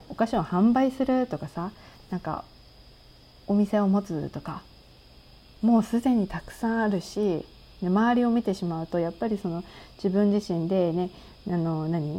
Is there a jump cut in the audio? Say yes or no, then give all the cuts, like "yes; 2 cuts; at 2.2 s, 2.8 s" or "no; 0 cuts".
no; 0 cuts